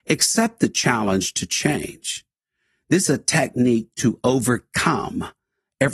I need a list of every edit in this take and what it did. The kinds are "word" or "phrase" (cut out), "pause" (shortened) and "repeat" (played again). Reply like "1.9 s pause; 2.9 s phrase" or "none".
3.1 s word

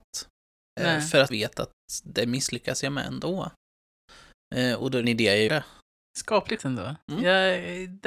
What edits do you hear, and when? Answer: 1.3 s word; 5.0 s word; 5.5 s word; 6.6 s word

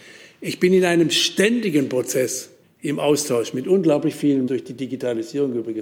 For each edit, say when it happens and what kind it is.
2.6 s pause; 4.5 s word

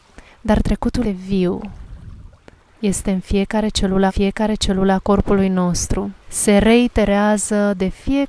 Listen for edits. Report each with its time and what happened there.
1.0 s word; 2.4 s pause; 4.1 s repeat; 6.2 s pause

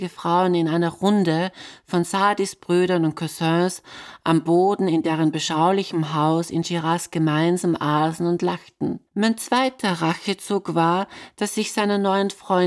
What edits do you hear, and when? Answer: 9.1 s pause

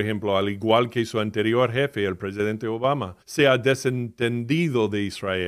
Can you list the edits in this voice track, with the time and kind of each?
3.2 s pause

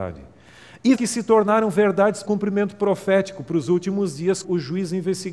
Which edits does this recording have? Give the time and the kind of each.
0.9 s word; 2.2 s word; 4.4 s word

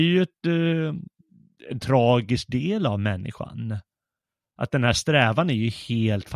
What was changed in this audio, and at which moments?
none

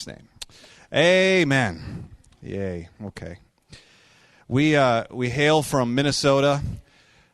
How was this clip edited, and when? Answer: none

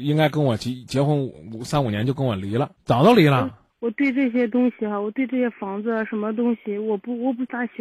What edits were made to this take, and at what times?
2.8 s pause; 3.7 s pause

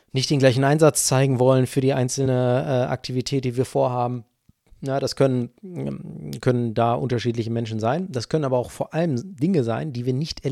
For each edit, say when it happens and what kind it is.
none

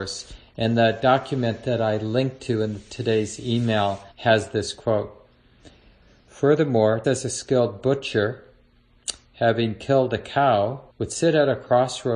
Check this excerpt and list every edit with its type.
4.1 s pause; 7.0 s word; 10.9 s pause

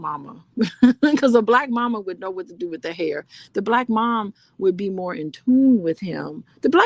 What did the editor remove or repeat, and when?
none

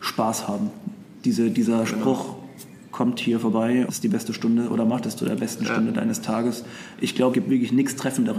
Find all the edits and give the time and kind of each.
3.9 s word; 7.3 s word

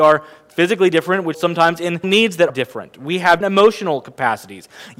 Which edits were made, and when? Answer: 1.3 s word; 2.0 s word; 2.5 s word; 3.4 s word

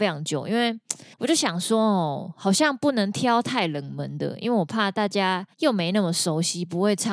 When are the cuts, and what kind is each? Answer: 1.1 s pause; 5.5 s pause

